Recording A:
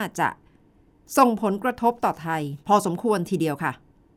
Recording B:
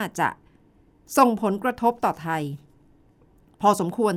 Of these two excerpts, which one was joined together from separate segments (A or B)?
A